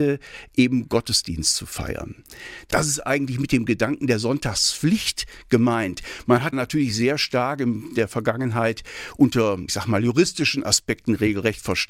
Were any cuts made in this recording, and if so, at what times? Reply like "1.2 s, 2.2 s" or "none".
6.5 s, 9.7 s